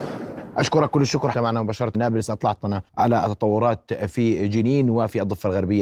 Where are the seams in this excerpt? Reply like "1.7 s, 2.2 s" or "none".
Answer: 1.3 s, 1.9 s, 2.9 s